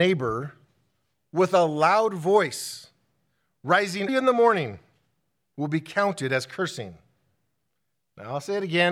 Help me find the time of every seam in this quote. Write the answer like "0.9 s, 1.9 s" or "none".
4.1 s